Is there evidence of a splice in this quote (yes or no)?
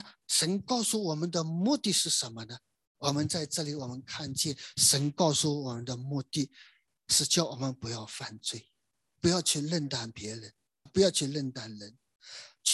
yes